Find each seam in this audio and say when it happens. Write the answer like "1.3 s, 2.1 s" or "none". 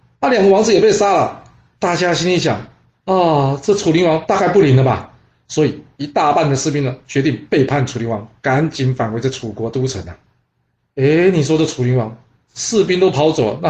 none